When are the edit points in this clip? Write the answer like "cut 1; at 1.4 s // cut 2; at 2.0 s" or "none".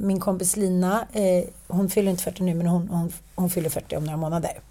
none